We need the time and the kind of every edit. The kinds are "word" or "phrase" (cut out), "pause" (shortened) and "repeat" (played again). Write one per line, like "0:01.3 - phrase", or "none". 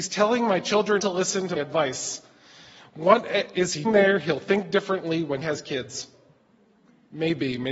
0:01.0 - word
0:01.6 - word
0:03.8 - word
0:05.4 - word